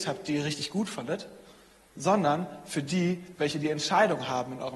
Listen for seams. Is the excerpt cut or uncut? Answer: uncut